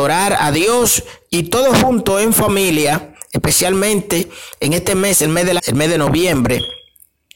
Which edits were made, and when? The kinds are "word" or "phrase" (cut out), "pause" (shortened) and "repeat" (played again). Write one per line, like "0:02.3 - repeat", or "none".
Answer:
0:05.6 - word